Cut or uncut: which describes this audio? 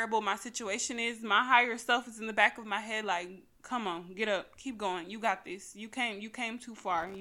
uncut